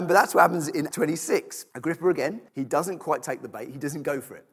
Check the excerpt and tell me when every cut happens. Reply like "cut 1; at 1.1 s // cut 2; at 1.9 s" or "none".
cut 1; at 0.9 s // cut 2; at 1.7 s // cut 3; at 2.5 s